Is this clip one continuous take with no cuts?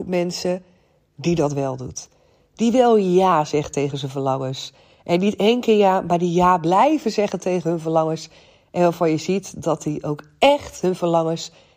yes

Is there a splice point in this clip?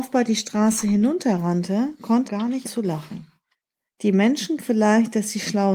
yes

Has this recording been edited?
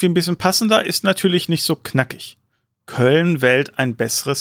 no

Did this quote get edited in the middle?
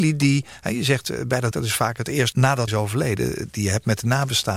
yes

